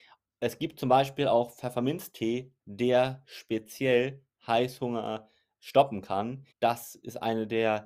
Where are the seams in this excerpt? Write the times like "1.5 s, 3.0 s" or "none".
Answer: 6.5 s